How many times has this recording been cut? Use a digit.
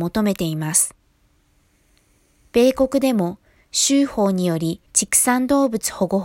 1